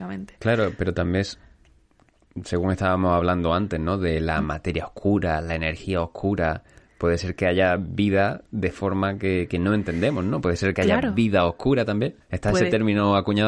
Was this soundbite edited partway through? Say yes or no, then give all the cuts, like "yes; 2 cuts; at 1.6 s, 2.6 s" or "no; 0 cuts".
yes; 1 cut; at 12.2 s